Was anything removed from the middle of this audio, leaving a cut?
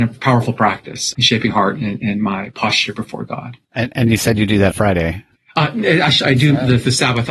yes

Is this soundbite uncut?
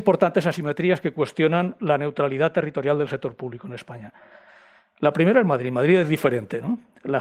yes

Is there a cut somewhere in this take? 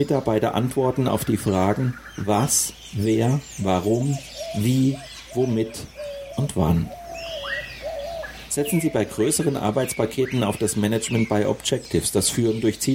no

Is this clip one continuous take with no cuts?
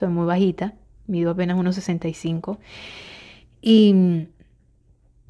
yes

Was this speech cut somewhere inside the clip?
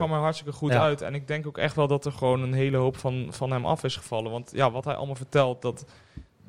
no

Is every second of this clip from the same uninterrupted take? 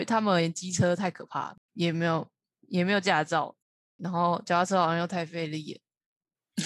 yes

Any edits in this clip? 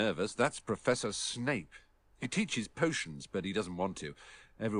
no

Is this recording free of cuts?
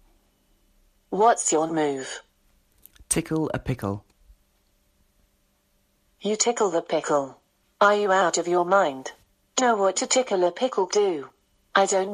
no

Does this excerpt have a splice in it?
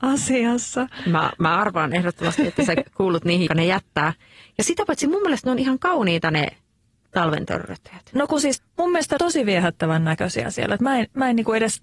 yes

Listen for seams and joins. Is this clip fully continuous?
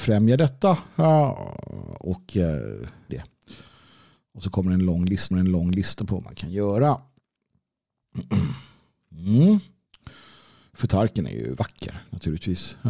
no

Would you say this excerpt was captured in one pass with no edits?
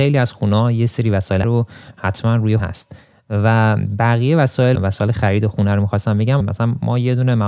no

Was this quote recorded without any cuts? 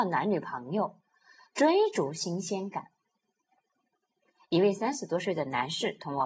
yes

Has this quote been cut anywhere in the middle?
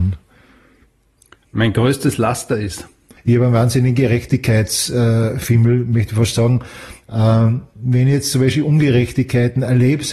no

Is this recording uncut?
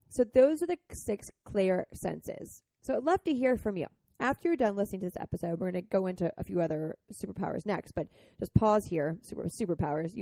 yes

